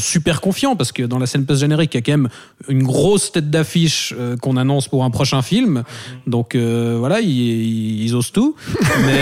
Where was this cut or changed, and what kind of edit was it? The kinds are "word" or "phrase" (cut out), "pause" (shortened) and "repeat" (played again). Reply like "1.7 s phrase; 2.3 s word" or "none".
none

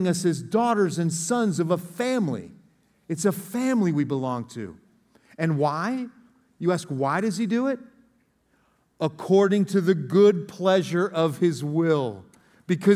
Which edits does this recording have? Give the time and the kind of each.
none

